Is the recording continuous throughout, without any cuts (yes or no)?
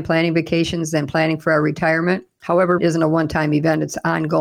no